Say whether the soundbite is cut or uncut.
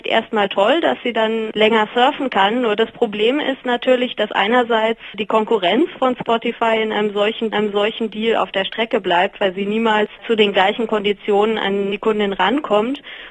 cut